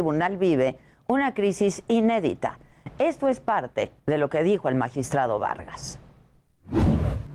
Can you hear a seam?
yes; 1 cut; at 4.0 s

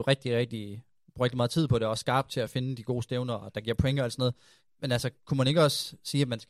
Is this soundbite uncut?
yes; 0 cuts

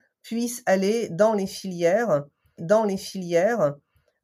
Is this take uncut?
no; 1 cut; at 2.6 s

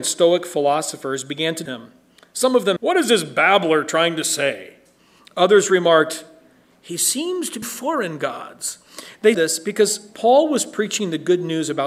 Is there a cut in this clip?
yes; 4 cuts; at 1.7 s, 2.8 s, 7.6 s, 9.3 s

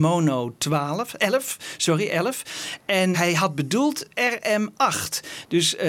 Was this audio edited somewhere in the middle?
yes; 2 cuts; at 3.1 s, 4.1 s

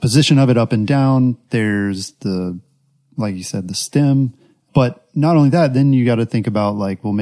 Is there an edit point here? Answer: no; 0 cuts

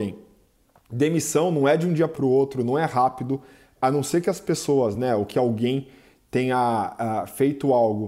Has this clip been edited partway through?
no; 0 cuts

